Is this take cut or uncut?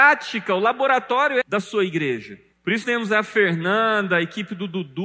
cut